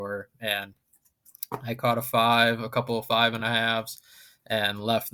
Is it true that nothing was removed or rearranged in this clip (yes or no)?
yes